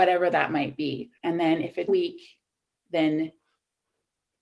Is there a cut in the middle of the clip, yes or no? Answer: yes